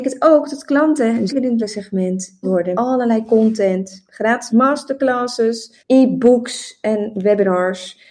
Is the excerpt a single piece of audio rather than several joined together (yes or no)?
no